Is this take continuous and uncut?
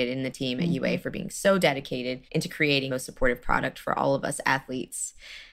no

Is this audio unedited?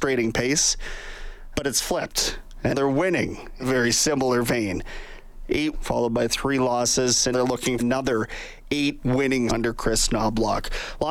no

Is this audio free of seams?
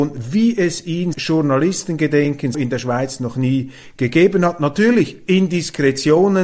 no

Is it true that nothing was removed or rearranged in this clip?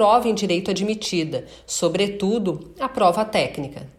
yes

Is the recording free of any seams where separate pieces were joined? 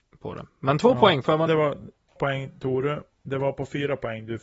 no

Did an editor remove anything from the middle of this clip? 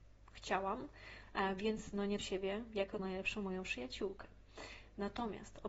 yes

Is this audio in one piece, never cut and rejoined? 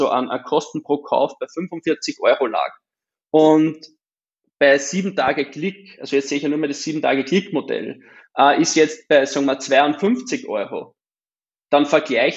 yes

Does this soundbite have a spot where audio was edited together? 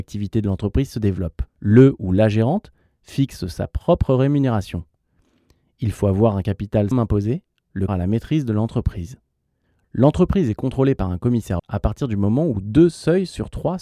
yes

